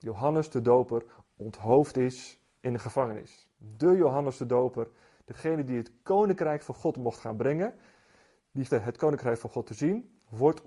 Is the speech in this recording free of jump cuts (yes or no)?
no